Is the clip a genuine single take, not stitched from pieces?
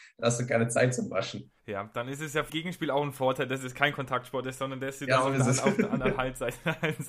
no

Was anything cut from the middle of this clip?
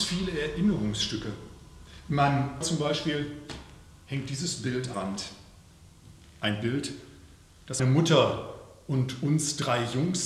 yes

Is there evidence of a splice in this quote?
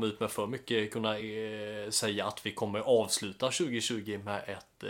no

